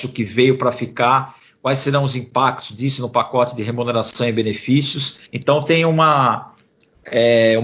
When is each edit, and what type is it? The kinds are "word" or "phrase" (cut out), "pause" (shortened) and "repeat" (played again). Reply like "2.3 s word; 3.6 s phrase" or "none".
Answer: 5.3 s pause